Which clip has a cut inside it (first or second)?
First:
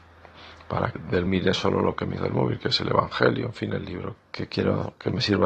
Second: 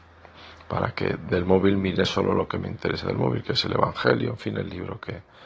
first